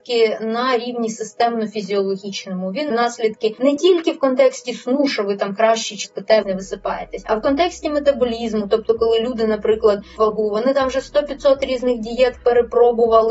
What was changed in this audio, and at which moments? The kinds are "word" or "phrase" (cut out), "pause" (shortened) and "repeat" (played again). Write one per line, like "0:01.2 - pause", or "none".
0:02.9 - word
0:06.0 - word
0:06.4 - word
0:10.2 - word